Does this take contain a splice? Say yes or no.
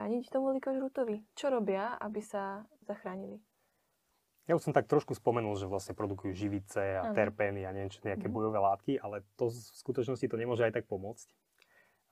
no